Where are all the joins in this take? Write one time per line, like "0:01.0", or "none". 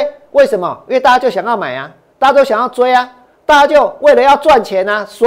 none